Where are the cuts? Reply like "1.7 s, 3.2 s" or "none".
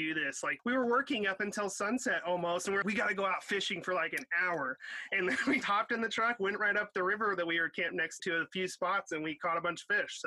2.8 s, 5.6 s, 8.2 s